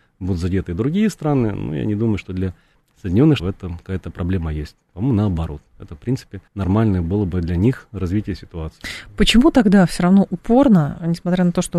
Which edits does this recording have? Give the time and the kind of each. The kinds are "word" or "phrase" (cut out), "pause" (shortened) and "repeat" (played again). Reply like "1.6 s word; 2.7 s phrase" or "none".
3.4 s word; 6.5 s pause